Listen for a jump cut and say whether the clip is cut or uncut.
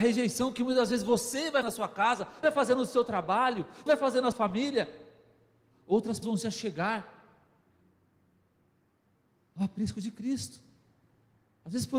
cut